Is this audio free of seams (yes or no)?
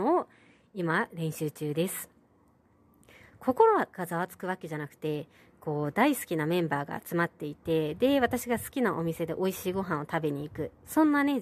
yes